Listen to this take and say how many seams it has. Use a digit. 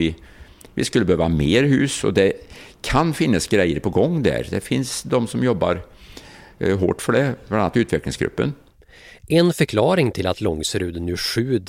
0